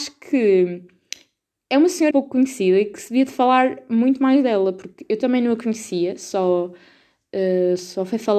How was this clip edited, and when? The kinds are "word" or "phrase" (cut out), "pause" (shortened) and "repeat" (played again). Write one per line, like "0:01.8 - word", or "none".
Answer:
0:02.1 - word